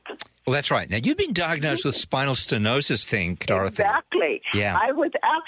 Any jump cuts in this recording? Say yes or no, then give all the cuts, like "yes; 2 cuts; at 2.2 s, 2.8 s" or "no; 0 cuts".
yes; 2 cuts; at 3.0 s, 3.4 s